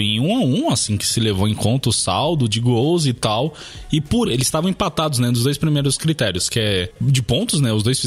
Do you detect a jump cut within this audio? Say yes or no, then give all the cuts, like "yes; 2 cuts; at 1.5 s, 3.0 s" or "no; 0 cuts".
yes; 1 cut; at 4.3 s